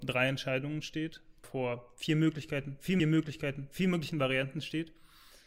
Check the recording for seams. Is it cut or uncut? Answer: cut